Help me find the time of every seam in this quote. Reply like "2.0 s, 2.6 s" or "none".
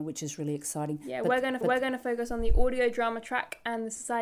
1.6 s